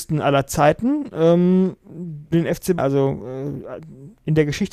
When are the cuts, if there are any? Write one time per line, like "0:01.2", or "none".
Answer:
0:02.3
0:02.8